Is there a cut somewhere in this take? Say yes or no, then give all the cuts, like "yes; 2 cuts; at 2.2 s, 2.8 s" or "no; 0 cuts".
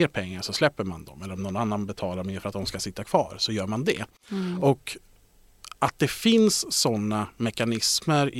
no; 0 cuts